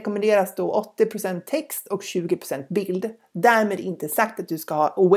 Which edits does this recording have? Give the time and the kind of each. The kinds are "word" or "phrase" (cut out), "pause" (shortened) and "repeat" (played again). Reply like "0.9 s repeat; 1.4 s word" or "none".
none